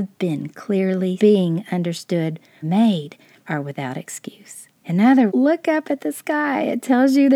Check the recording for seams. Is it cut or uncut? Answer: cut